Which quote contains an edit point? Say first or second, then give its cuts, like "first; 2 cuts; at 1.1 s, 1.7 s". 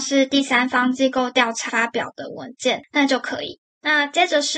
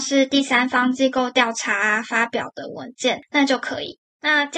first; 1 cut; at 1.7 s